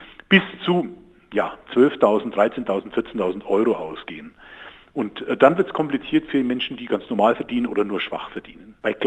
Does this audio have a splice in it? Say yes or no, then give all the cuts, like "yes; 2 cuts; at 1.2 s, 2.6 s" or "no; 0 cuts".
no; 0 cuts